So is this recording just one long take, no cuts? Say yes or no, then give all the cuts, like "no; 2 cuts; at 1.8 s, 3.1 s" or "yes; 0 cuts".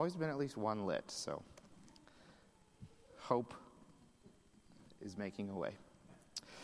yes; 0 cuts